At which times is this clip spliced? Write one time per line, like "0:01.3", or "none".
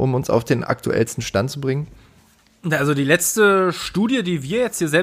none